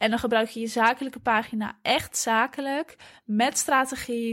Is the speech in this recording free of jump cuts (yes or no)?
yes